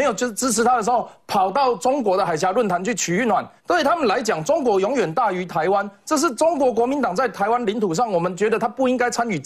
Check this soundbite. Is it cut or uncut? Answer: cut